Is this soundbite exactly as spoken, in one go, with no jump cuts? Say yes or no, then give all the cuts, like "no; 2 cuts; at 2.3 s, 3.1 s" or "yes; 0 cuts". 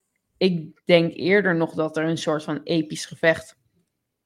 yes; 0 cuts